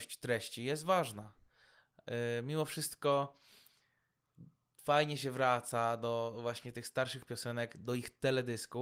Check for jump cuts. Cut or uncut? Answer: uncut